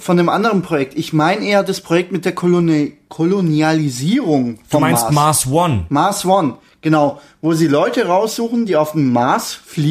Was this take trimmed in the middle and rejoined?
no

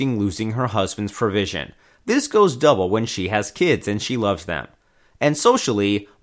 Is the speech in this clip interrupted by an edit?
no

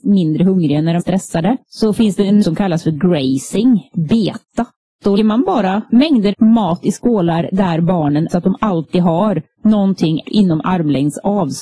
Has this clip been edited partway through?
yes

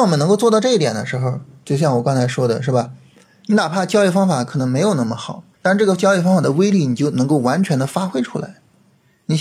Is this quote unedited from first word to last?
no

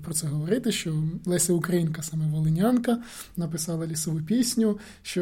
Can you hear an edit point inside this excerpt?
no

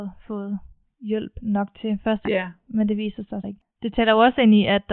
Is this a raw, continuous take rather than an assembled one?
no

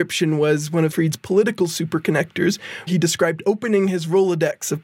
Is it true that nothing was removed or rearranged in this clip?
no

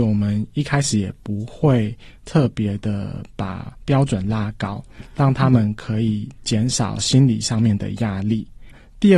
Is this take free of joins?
yes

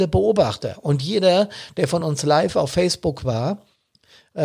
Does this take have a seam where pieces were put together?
no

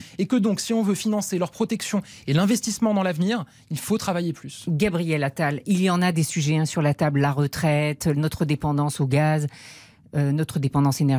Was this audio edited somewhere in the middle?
no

